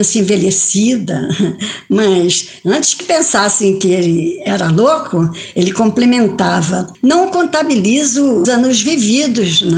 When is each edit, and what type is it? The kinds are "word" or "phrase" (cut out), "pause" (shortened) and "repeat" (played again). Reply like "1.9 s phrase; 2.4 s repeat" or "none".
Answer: 8.4 s word